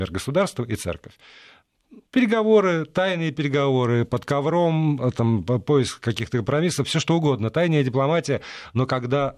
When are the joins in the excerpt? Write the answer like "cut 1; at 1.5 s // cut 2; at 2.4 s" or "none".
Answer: cut 1; at 2.1 s